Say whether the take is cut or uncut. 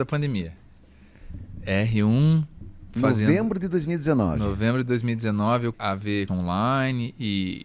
cut